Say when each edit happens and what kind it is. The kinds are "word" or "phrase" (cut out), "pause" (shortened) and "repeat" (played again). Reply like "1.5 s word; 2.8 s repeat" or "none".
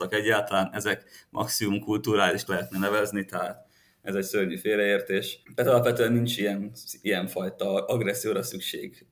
2.5 s word; 5.4 s pause